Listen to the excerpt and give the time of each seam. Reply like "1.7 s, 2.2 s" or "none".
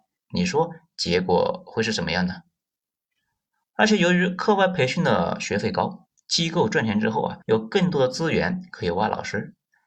7.4 s